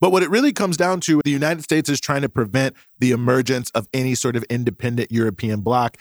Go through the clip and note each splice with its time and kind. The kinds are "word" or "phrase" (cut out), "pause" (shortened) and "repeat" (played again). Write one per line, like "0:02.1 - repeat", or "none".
0:01.2 - word

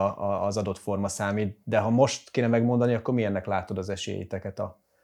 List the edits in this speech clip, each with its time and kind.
none

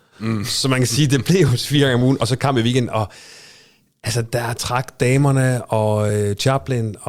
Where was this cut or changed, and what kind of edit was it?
none

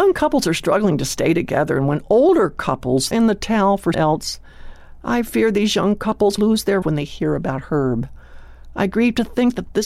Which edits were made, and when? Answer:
0:03.1 - word
0:03.9 - word
0:06.4 - word
0:06.8 - word

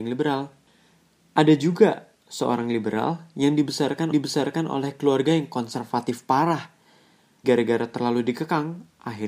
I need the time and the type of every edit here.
0:02.1 - pause
0:04.1 - repeat
0:07.4 - word

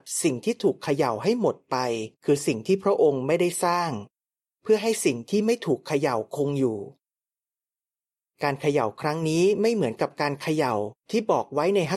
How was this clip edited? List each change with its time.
0:02.1 - pause

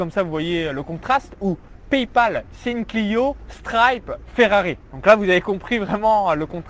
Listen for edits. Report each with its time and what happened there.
none

